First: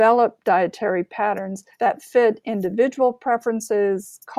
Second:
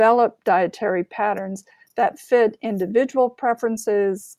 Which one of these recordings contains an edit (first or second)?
first